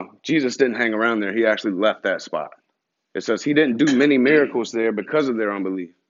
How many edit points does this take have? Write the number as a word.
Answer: one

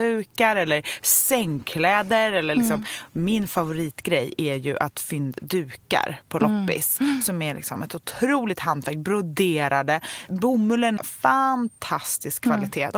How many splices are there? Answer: two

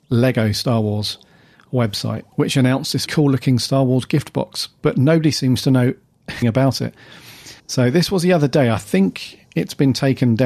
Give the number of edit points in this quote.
four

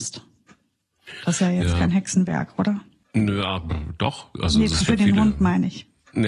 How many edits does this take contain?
two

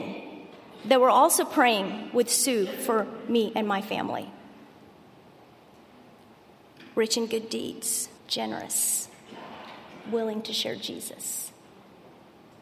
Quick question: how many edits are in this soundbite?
one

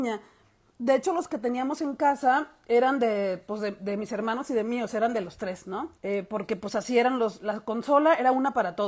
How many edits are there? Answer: one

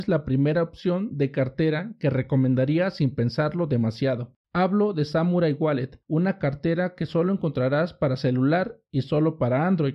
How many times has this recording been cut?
two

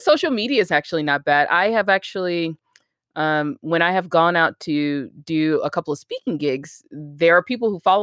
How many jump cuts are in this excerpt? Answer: zero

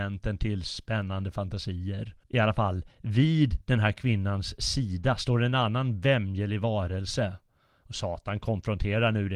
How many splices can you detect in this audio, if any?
one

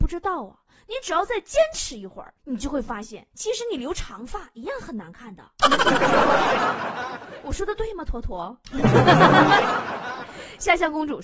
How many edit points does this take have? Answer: two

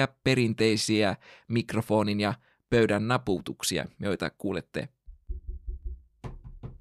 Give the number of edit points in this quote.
zero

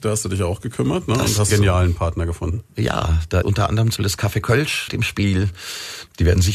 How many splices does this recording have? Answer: four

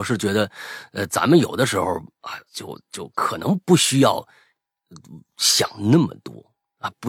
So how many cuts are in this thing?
one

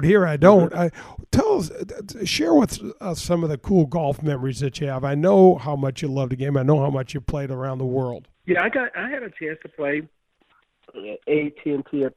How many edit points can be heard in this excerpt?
one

